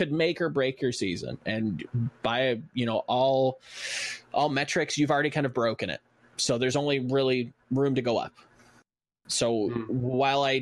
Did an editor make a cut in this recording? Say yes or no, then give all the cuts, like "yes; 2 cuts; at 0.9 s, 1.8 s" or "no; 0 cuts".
no; 0 cuts